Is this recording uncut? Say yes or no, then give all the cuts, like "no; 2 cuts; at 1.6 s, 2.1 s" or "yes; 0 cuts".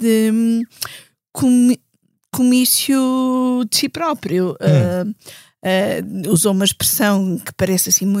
yes; 0 cuts